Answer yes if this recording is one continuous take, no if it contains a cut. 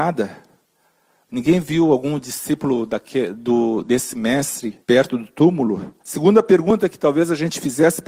no